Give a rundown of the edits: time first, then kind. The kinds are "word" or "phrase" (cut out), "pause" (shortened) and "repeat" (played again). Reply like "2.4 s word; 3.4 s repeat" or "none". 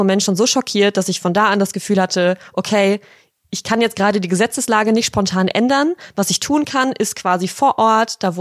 none